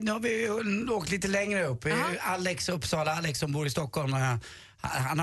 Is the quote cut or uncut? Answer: uncut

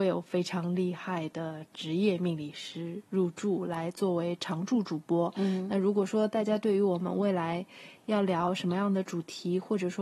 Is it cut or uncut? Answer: uncut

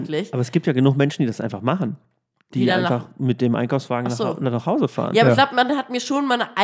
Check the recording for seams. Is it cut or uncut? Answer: uncut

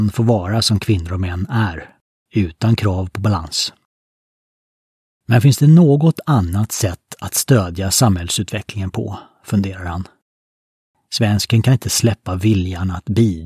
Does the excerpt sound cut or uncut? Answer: uncut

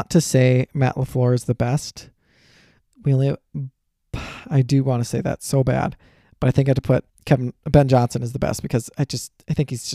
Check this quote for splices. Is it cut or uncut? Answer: cut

